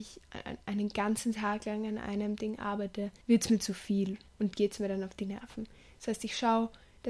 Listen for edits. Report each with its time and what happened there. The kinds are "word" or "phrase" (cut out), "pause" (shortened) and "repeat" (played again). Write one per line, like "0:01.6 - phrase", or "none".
0:03.2 - pause